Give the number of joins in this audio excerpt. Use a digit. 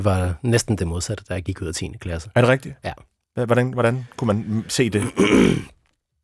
0